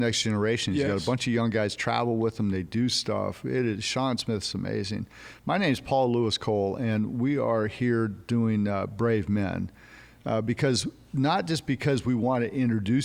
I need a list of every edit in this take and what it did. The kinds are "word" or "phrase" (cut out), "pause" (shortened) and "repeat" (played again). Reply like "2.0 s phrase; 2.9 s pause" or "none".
none

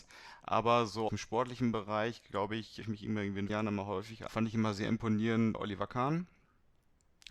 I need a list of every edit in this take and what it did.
1.1 s word; 2.8 s word; 3.5 s word; 4.3 s word; 5.5 s word

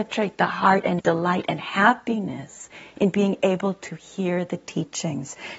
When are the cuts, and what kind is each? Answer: 1.0 s word

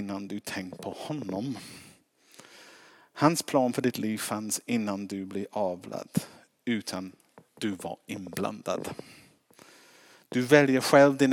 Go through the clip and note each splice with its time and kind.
none

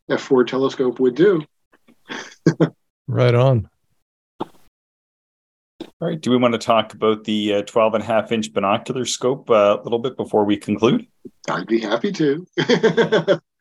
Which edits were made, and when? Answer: 5.9 s pause; 11.4 s pause

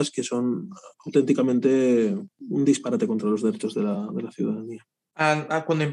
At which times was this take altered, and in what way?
0.9 s pause

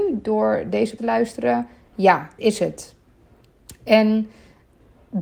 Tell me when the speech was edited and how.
1.0 s word; 2.4 s word

